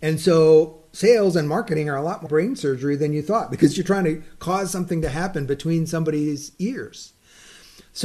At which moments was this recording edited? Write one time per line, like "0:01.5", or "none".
0:02.3